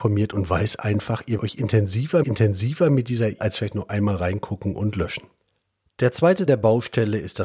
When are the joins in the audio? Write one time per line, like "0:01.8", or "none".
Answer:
0:01.4
0:02.2
0:03.4
0:05.4
0:06.5